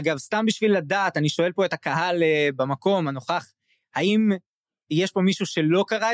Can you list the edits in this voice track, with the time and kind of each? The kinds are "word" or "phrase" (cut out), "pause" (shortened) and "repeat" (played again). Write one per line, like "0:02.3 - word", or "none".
none